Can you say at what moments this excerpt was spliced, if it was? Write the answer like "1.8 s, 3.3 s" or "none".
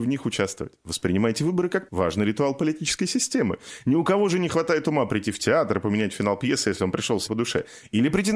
1.9 s, 7.3 s